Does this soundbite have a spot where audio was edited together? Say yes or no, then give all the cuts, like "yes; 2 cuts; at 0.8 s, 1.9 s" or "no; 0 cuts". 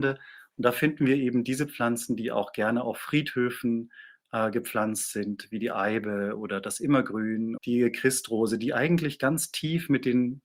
yes; 1 cut; at 7.6 s